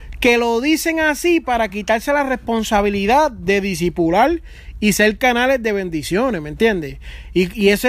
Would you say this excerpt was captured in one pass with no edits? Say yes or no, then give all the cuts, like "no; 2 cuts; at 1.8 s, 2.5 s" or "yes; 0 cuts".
yes; 0 cuts